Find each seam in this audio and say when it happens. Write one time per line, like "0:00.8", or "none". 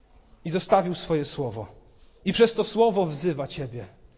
0:02.0